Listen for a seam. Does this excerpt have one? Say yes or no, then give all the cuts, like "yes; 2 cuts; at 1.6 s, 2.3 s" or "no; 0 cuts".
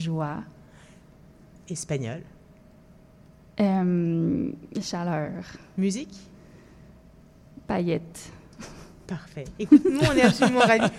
no; 0 cuts